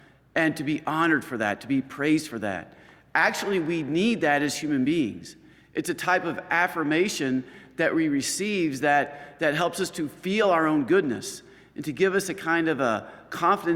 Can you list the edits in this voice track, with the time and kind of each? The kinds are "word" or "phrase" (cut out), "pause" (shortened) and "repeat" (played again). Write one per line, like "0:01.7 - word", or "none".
none